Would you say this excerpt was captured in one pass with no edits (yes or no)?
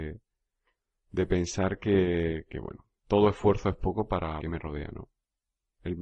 no